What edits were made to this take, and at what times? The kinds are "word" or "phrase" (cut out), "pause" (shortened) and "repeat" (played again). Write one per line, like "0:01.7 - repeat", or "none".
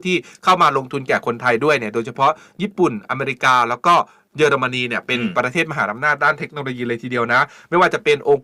none